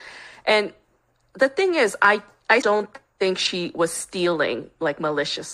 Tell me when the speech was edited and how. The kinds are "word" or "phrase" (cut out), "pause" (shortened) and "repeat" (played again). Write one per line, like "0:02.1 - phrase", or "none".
0:02.6 - word